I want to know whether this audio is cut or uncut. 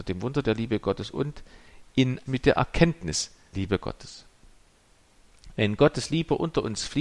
cut